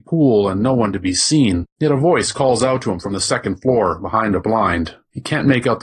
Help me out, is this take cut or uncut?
uncut